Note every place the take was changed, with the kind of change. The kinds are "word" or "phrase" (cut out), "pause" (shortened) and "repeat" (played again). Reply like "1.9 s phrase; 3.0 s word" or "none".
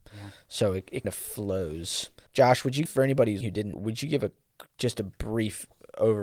1.0 s word; 2.3 s word; 2.9 s word; 3.4 s word; 3.7 s word